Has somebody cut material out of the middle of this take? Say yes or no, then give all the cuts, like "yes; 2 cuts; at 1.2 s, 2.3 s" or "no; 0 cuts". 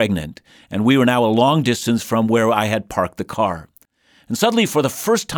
no; 0 cuts